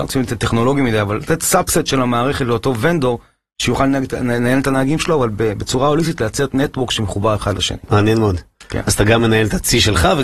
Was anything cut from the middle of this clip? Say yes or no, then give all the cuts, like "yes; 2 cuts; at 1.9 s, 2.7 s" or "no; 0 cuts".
no; 0 cuts